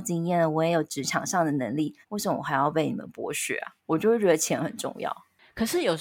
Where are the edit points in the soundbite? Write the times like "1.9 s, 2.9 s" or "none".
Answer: 2.0 s, 3.8 s